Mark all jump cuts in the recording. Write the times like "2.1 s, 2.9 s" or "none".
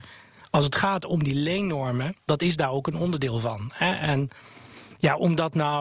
2.2 s

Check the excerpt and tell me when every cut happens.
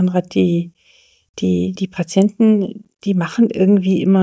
1.8 s, 2.9 s

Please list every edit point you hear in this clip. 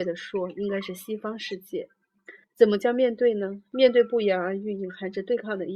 2.4 s

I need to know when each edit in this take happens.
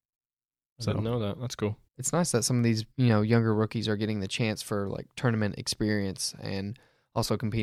1.9 s, 2.9 s

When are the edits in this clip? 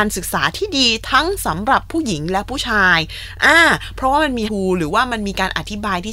4.5 s

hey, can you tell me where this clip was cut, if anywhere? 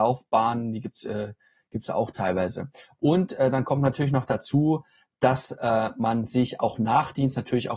none

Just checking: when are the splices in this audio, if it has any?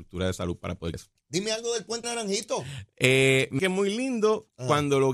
0.9 s, 2.0 s, 3.6 s

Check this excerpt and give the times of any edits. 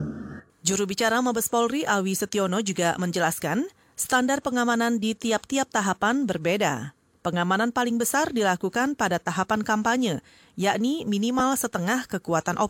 none

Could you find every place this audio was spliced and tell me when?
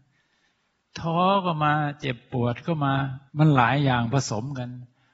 3.3 s

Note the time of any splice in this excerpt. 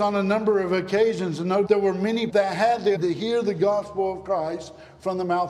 1.7 s, 2.3 s, 3.0 s

